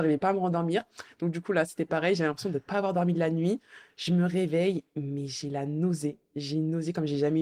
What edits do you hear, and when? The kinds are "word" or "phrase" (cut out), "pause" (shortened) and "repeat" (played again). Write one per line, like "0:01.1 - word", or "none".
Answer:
none